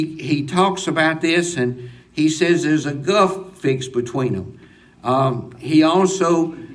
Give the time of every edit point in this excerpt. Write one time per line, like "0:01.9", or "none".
none